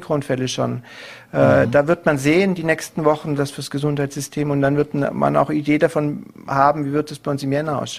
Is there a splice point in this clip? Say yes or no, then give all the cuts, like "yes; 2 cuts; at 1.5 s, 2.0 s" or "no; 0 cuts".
yes; 1 cut; at 3.4 s